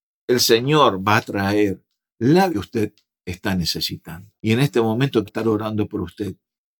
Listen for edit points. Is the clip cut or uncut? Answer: cut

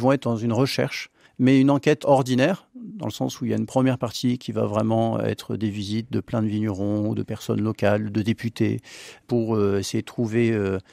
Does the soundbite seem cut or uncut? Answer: uncut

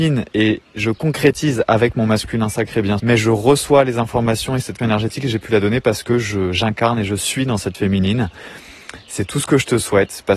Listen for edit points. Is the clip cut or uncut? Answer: cut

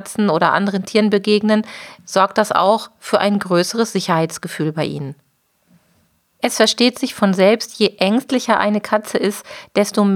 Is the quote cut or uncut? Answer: uncut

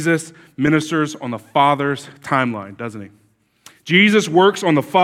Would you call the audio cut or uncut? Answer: uncut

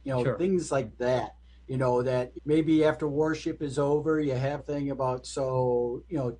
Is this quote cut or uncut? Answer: cut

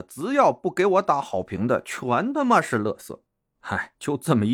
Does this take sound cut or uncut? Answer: uncut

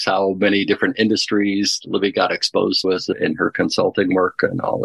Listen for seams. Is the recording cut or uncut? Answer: cut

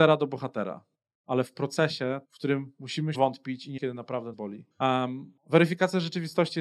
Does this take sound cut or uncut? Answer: cut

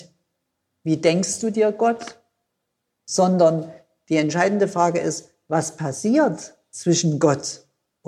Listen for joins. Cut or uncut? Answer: uncut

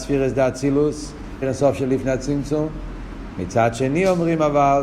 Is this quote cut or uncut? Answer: cut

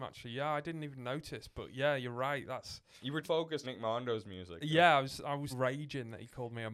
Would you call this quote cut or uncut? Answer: cut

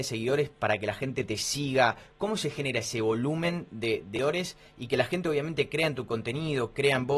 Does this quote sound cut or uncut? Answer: uncut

